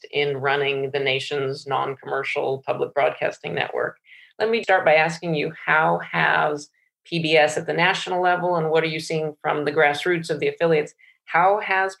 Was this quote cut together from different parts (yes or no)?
yes